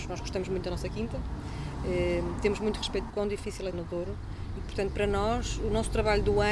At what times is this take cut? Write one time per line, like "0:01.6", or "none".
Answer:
0:03.1
0:03.7